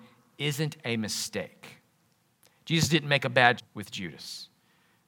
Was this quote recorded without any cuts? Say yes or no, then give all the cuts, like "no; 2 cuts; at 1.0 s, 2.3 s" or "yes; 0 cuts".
no; 1 cut; at 3.6 s